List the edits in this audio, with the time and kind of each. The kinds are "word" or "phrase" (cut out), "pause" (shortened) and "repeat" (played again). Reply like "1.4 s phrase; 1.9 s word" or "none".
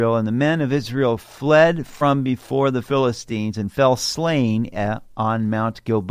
none